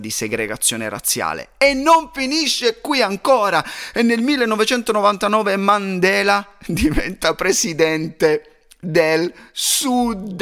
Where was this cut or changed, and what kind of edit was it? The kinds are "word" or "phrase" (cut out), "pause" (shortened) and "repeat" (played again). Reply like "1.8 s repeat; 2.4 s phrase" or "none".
none